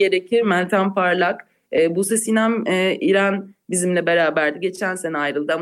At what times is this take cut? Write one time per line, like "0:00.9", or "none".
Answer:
none